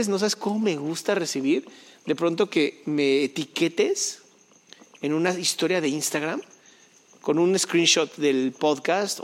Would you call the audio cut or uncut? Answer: uncut